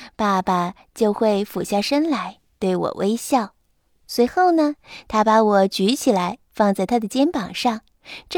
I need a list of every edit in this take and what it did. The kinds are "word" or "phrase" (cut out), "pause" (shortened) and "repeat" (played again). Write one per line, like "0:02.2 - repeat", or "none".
none